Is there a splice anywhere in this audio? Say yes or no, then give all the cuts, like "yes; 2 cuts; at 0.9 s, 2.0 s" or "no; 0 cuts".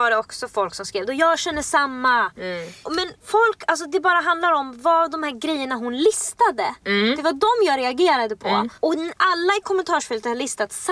no; 0 cuts